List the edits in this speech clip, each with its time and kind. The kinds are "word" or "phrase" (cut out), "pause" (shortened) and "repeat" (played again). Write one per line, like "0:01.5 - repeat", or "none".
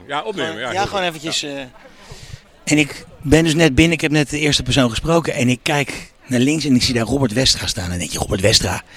0:02.4 - pause